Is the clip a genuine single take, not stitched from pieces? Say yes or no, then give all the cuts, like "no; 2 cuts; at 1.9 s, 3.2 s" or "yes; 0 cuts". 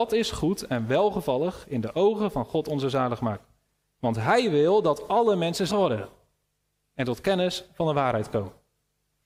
no; 1 cut; at 5.7 s